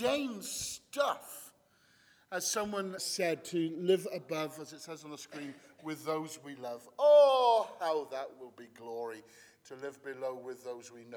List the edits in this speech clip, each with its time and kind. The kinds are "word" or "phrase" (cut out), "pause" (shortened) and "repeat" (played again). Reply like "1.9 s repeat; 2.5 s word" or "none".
3.0 s word